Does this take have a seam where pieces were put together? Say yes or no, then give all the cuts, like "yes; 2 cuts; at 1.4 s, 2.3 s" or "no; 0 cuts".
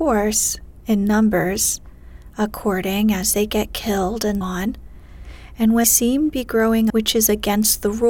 yes; 4 cuts; at 4.4 s, 5.8 s, 6.3 s, 6.9 s